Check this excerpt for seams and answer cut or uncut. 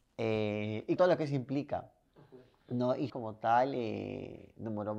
cut